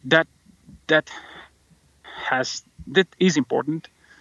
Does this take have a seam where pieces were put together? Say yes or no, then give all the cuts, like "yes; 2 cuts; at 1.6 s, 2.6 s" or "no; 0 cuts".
no; 0 cuts